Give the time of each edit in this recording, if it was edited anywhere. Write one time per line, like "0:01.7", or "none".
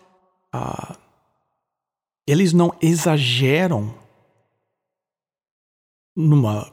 none